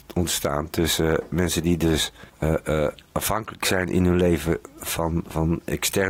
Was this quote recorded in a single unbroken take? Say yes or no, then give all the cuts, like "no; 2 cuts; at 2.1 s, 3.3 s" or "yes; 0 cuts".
no; 1 cut; at 2.3 s